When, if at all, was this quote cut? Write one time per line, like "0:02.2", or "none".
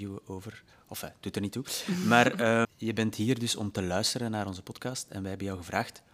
0:02.6